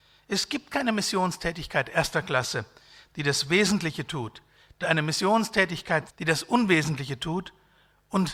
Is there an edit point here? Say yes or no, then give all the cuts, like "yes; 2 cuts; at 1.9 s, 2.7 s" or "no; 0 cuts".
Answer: yes; 2 cuts; at 4.8 s, 6.1 s